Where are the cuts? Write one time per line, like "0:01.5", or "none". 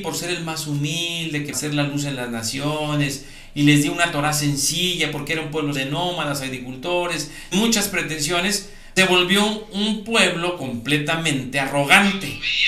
0:01.5
0:05.7
0:07.5
0:09.0